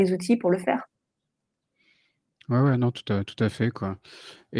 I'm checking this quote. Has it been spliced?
no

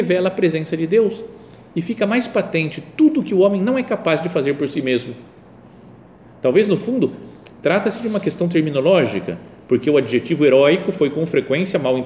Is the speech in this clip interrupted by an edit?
no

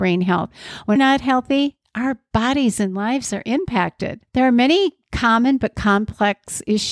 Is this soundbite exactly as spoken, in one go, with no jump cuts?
no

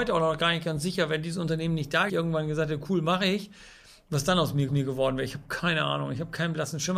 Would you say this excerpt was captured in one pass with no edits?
no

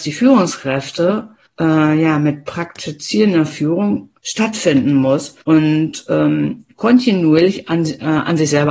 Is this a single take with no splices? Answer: no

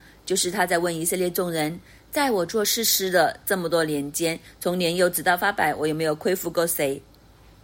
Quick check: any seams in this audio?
no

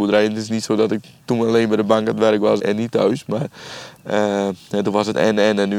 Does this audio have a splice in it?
yes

